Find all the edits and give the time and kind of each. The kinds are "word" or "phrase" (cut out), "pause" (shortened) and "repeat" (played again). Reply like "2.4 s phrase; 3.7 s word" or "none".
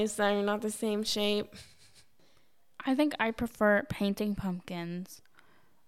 none